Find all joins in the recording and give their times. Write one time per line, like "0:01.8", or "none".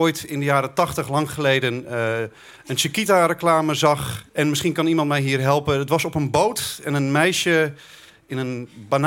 0:04.3